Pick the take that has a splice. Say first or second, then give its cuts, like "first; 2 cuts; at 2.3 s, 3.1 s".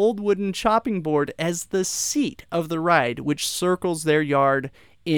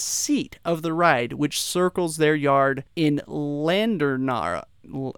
second; 1 cut; at 2.9 s